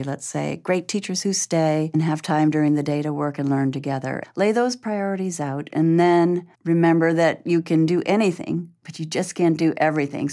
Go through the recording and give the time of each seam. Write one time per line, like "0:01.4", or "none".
0:06.6